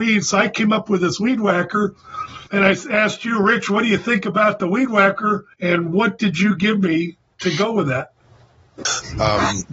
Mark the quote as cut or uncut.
cut